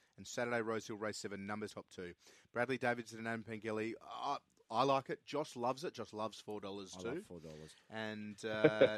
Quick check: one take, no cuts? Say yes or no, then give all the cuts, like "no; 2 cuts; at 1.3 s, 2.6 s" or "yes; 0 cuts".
no; 1 cut; at 1.7 s